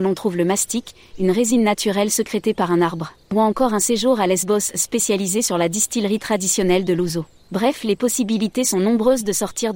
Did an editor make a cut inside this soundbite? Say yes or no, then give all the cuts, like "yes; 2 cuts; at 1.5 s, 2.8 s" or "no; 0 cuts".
yes; 2 cuts; at 3.2 s, 7.4 s